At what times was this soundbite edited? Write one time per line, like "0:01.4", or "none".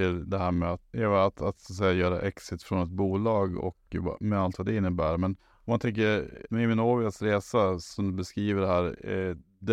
0:00.9
0:05.4
0:06.5